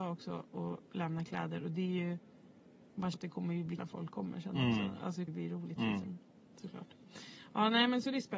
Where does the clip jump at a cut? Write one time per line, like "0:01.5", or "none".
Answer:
0:03.1
0:03.8
0:05.3